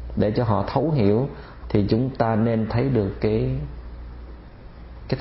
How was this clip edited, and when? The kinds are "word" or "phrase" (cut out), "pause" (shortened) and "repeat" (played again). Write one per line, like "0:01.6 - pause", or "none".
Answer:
0:01.6 - phrase
0:02.7 - phrase

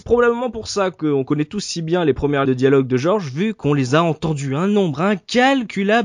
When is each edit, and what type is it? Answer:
0:02.4 - word

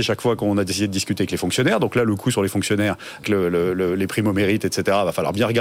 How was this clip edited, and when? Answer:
0:03.2 - word

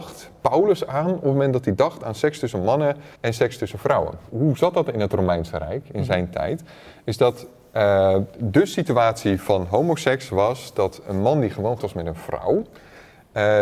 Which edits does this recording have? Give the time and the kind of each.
0:03.2 - pause
0:11.8 - word

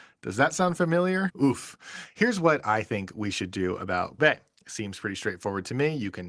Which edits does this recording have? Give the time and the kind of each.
0:04.2 - word

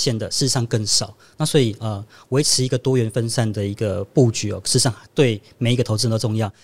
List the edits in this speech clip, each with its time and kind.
none

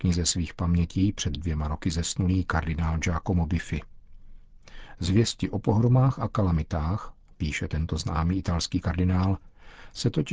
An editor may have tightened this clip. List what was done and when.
none

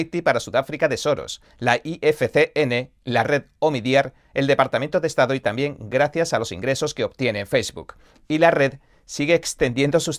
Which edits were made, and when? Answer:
none

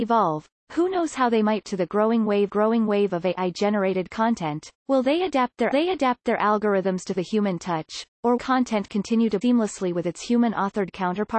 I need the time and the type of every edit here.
0:01.6 - word
0:02.5 - repeat
0:04.8 - pause
0:05.7 - repeat
0:07.2 - word
0:08.4 - phrase
0:09.4 - word

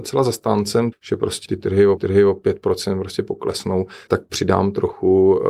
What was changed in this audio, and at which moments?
0:00.9 - word
0:01.5 - word
0:02.0 - repeat
0:04.1 - word

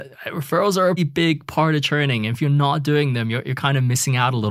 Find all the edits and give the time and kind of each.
0:01.0 - word

